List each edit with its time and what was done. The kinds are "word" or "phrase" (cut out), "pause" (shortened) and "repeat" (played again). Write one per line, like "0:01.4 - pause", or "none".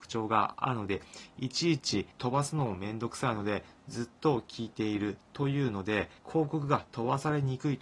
0:02.1 - pause
0:06.2 - pause